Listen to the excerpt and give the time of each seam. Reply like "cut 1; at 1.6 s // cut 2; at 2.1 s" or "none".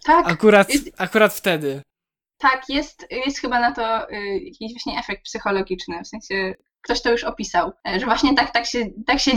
none